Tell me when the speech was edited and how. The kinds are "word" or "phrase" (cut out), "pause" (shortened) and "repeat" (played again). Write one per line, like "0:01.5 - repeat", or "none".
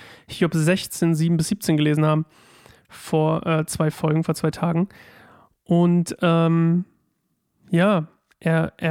none